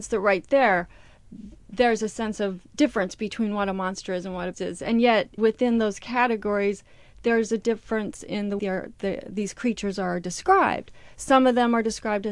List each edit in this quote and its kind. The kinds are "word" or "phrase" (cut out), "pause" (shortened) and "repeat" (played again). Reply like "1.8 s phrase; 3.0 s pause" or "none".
4.5 s word; 5.4 s word; 8.6 s word